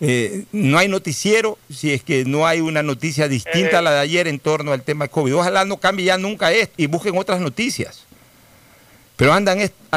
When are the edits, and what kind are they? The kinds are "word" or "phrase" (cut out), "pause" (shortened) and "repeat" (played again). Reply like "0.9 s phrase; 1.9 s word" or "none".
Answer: 6.7 s word